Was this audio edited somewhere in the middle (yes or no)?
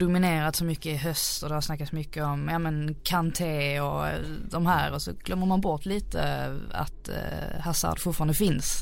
no